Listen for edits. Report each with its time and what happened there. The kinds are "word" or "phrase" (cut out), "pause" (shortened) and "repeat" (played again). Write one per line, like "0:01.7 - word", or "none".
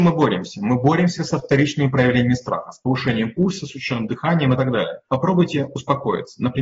0:05.1 - pause